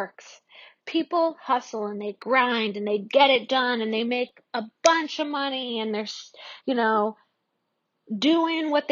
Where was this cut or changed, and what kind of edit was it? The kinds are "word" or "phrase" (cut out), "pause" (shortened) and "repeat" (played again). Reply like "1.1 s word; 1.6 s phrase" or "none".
none

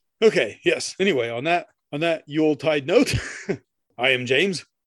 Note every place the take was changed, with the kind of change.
1.8 s pause; 3.7 s pause

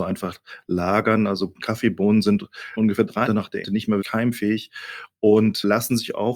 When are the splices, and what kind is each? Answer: 2.8 s word; 3.3 s word; 3.6 s word; 4.0 s word

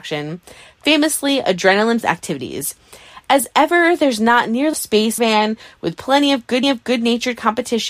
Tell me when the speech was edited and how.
2.0 s word; 4.7 s word; 5.2 s phrase; 6.6 s repeat

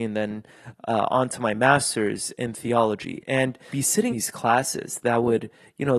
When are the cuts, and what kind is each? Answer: 3.7 s word; 4.1 s word

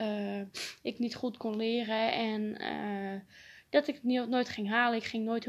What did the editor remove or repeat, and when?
none

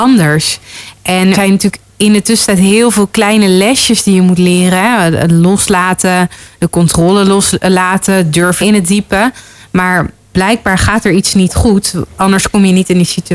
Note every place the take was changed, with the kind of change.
1.3 s word; 8.6 s word; 10.3 s word

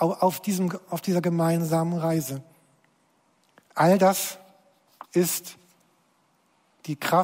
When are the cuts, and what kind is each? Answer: 5.1 s pause

